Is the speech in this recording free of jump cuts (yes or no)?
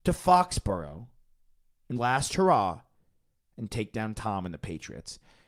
no